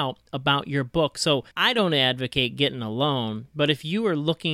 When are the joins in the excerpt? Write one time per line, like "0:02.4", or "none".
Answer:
0:01.5

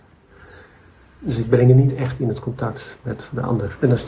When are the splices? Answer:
none

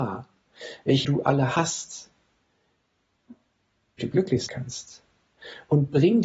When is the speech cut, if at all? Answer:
0:01.0
0:04.0
0:04.5

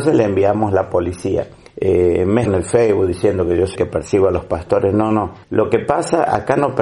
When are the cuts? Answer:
0:01.7
0:02.5
0:03.8
0:05.4

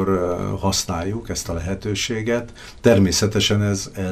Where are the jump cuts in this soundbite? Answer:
none

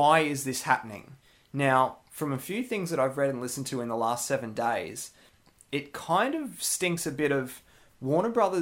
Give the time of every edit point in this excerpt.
none

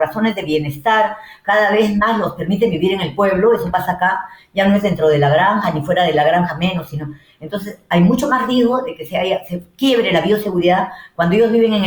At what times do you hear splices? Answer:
none

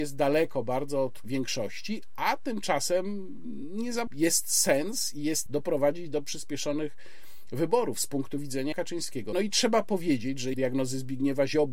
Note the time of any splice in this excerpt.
0:01.2
0:04.1
0:05.5
0:08.7

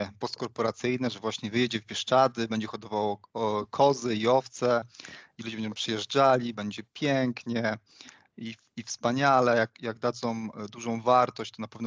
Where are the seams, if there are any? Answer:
none

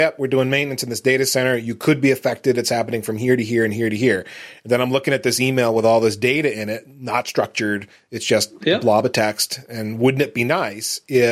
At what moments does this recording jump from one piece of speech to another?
none

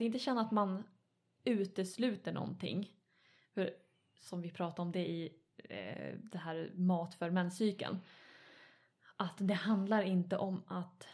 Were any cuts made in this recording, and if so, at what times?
none

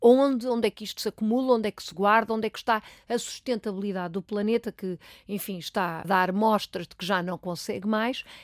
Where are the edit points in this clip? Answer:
0:06.0

